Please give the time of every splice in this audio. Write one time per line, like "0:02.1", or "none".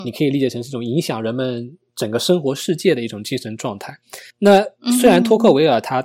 0:04.3